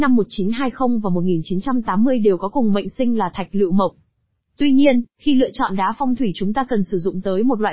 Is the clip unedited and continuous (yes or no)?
yes